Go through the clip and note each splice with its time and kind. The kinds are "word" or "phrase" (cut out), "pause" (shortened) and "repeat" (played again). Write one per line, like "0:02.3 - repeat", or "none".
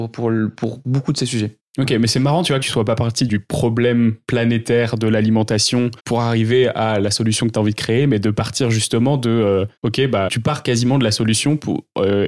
0:01.7 - pause
0:02.6 - phrase
0:03.3 - word
0:06.0 - pause
0:09.8 - pause
0:10.3 - word